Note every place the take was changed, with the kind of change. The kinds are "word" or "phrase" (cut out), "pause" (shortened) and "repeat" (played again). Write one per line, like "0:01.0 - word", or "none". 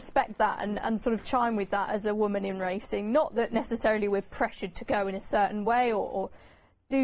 none